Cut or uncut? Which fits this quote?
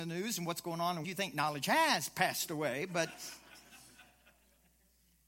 cut